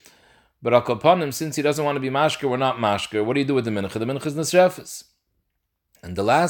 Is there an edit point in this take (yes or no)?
no